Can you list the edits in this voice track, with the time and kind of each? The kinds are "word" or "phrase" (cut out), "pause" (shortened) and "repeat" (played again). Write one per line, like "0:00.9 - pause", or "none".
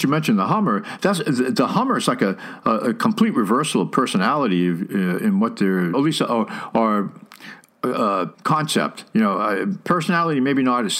0:05.9 - phrase
0:08.3 - pause